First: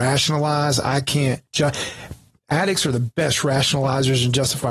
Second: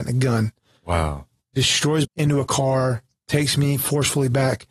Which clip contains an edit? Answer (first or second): second